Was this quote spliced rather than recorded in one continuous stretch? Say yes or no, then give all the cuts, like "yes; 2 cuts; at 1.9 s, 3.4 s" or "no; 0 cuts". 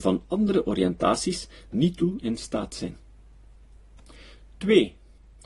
yes; 2 cuts; at 1.7 s, 2.2 s